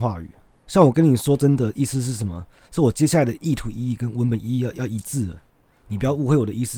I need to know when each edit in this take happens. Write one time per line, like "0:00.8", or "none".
none